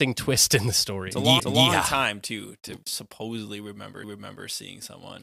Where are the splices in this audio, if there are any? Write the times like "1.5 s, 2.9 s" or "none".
1.4 s, 2.8 s, 4.0 s